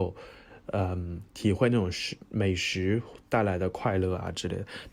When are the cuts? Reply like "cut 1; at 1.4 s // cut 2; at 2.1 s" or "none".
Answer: cut 1; at 1.3 s // cut 2; at 2.2 s